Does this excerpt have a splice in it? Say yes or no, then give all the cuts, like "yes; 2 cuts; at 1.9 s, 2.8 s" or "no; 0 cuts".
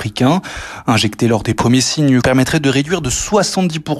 yes; 1 cut; at 2.2 s